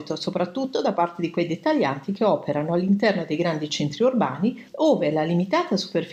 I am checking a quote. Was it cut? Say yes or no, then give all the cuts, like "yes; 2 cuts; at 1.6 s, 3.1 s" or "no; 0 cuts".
yes; 1 cut; at 4.7 s